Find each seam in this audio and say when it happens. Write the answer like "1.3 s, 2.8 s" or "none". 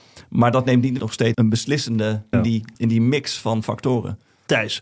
1.0 s, 1.3 s, 2.3 s, 2.7 s